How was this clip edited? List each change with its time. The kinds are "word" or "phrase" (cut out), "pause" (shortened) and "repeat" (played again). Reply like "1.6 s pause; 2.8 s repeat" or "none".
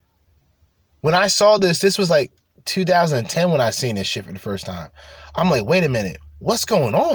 none

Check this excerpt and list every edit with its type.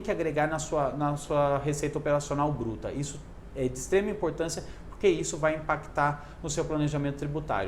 none

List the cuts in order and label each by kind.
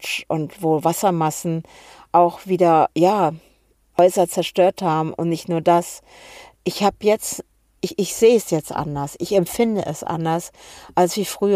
2.9 s pause

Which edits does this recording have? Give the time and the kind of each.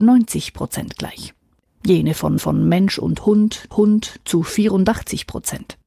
1.6 s pause; 2.4 s repeat; 3.7 s repeat

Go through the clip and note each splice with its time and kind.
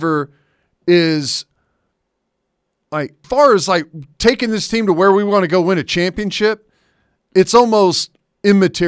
3.2 s word

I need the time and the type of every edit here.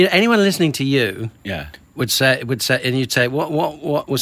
1.4 s pause

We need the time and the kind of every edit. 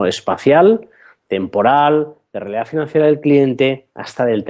none

